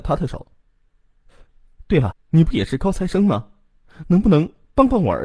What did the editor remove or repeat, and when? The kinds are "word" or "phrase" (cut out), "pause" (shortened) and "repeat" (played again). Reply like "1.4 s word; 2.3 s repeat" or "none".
2.1 s word